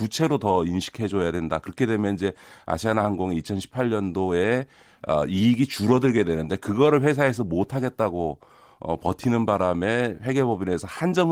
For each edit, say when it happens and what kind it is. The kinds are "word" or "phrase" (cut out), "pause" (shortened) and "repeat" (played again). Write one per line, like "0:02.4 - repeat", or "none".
none